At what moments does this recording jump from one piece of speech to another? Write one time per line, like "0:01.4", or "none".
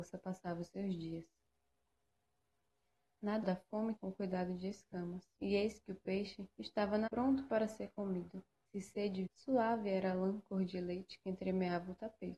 0:03.4
0:04.0
0:05.4
0:06.5
0:07.1
0:08.7
0:09.3